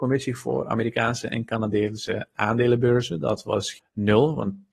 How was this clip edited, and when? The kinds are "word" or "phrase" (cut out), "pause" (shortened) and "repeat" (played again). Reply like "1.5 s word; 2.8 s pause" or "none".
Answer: 3.8 s word